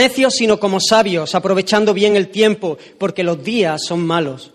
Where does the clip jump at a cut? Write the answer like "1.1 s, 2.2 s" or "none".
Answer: none